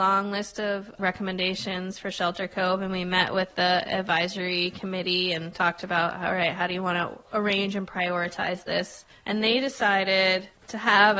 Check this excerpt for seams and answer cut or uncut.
uncut